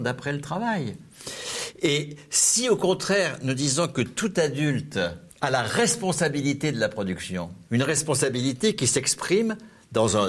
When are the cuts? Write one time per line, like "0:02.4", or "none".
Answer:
0:05.3
0:07.6